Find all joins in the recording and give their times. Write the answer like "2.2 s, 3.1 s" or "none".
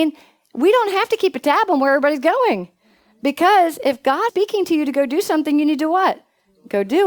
4.3 s